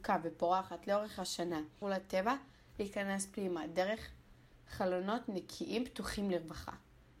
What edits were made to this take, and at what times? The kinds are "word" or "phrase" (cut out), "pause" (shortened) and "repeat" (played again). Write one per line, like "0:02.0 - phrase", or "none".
0:01.8 - word